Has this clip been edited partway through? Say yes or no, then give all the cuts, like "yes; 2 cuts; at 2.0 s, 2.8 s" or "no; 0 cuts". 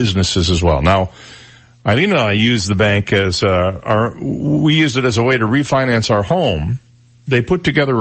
no; 0 cuts